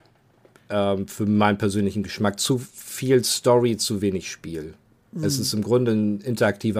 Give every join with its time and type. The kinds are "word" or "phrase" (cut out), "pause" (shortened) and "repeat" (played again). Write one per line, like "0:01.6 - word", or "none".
none